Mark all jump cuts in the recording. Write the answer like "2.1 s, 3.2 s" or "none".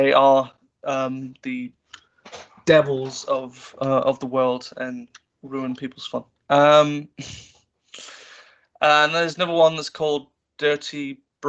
none